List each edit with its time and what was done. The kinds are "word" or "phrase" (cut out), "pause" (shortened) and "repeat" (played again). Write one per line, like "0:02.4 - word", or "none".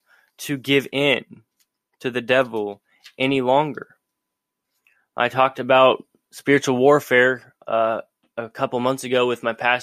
none